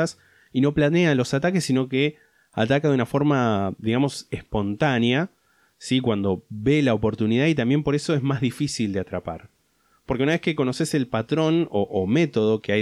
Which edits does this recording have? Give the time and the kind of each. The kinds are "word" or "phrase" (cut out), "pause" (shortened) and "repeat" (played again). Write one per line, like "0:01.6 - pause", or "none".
none

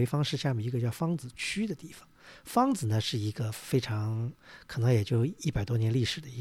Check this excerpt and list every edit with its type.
none

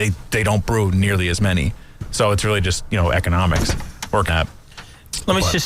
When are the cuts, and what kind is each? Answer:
0:04.3 - word

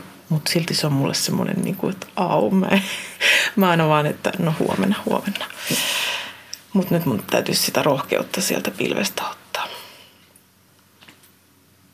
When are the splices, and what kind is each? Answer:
none

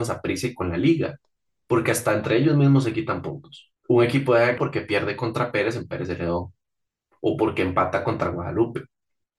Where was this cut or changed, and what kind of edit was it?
0:03.8 - pause
0:04.6 - word

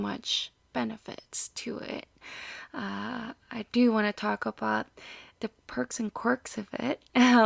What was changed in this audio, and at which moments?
0:05.6 - pause

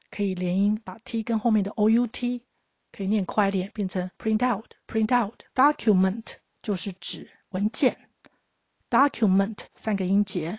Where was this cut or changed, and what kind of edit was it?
0:04.1 - pause
0:04.8 - pause
0:05.5 - pause

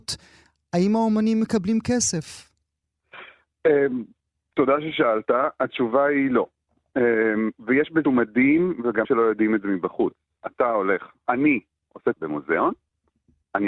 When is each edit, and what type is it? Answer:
0:08.0 - word
0:09.0 - word
0:11.3 - word
0:12.1 - word

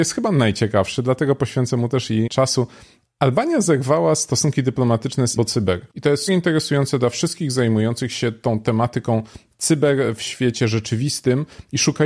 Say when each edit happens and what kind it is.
0:02.3 - word
0:05.4 - word
0:05.9 - pause
0:06.3 - word

